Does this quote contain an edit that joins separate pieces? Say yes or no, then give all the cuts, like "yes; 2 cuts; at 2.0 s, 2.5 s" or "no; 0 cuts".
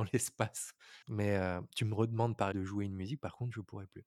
yes; 2 cuts; at 1.0 s, 2.5 s